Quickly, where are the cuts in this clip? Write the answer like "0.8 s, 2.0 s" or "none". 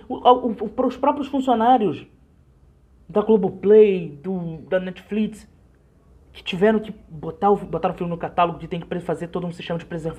none